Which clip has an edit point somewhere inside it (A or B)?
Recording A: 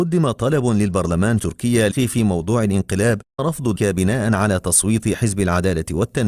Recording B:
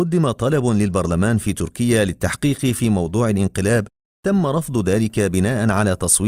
A